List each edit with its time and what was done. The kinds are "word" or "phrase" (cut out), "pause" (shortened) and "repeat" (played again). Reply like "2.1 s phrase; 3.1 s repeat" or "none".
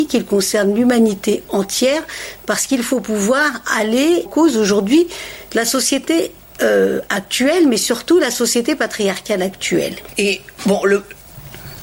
4.3 s phrase